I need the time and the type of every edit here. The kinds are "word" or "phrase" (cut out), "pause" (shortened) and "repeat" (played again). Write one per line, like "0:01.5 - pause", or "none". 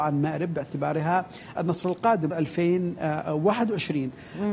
0:01.6 - word
0:02.3 - phrase